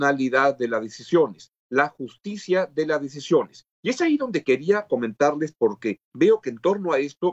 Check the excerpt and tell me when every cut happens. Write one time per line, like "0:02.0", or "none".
0:01.6
0:03.7
0:06.0

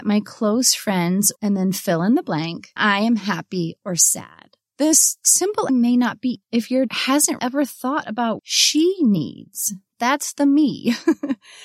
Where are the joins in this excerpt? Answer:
0:01.4
0:02.8
0:05.7
0:06.4
0:06.9
0:07.4
0:08.4

